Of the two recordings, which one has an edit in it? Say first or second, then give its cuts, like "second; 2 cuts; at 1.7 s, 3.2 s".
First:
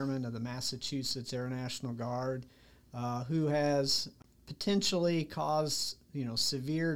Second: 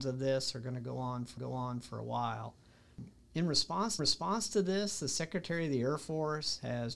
second; 2 cuts; at 1.4 s, 4.0 s